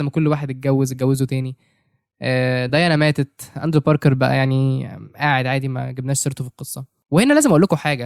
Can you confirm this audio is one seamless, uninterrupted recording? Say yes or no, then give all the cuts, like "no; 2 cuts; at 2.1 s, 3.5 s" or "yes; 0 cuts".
yes; 0 cuts